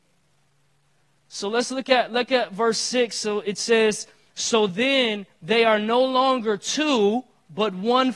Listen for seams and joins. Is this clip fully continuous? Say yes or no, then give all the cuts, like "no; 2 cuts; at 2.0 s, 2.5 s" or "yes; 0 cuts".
yes; 0 cuts